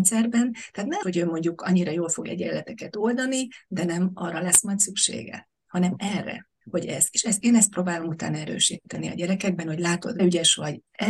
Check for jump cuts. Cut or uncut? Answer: cut